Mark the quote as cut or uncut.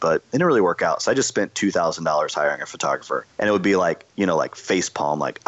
cut